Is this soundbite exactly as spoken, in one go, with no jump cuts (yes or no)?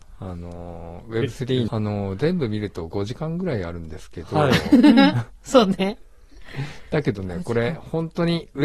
no